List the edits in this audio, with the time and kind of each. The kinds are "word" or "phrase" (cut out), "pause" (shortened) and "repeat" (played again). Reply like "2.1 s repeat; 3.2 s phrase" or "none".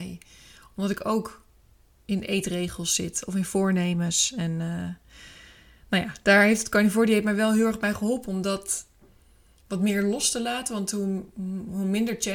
none